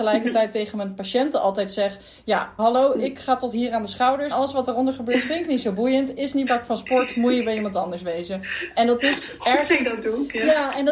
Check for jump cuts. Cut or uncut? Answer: cut